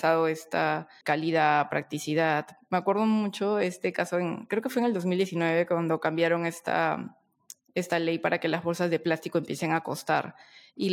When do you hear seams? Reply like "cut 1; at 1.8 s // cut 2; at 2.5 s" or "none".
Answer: cut 1; at 1.0 s